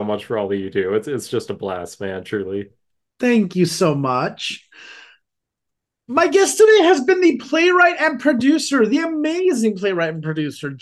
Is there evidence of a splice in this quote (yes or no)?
no